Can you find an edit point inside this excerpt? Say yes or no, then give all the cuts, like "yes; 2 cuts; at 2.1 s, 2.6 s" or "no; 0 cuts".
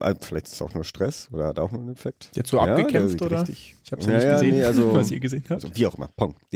no; 0 cuts